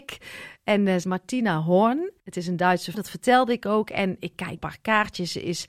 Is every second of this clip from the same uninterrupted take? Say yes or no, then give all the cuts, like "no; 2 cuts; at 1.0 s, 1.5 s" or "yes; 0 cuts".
no; 4 cuts; at 1.0 s, 2.2 s, 2.9 s, 4.6 s